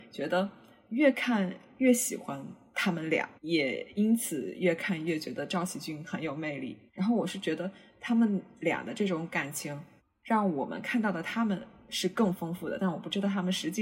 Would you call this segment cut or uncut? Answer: cut